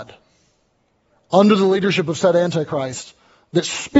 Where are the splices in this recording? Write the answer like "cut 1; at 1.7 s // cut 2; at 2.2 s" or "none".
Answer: none